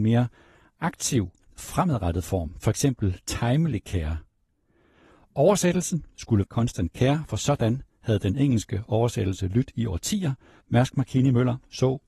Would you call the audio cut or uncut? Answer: cut